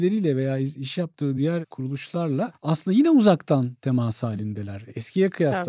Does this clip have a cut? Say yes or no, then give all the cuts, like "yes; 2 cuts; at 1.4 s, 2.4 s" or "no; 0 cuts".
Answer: no; 0 cuts